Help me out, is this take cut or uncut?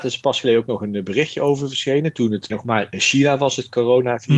cut